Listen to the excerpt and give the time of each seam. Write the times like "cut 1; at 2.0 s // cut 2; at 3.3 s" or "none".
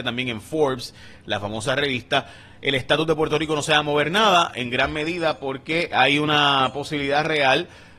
cut 1; at 5.9 s